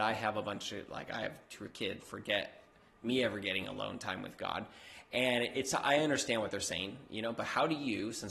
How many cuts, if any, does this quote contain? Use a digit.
2